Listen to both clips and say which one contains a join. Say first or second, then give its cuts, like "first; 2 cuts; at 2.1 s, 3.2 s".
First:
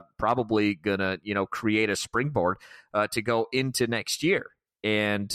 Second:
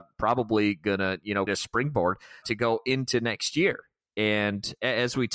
second; 2 cuts; at 1.5 s, 2.4 s